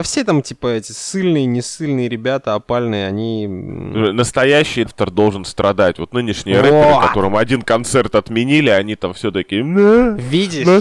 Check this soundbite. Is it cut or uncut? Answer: cut